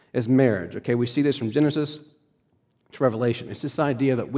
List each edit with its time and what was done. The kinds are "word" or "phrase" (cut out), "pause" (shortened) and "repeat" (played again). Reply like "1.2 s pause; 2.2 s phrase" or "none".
none